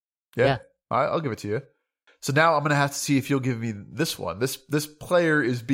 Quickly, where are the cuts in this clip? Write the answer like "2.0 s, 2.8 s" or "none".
none